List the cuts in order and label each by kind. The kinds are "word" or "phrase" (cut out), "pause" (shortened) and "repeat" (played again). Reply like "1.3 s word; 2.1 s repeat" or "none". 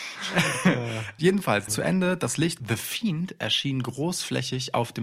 1.2 s word; 1.7 s phrase; 2.6 s phrase